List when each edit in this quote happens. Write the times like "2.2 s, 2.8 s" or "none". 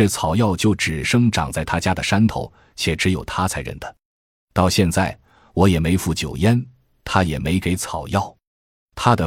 none